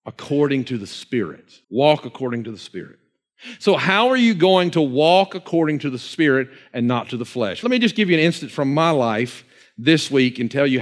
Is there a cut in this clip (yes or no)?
yes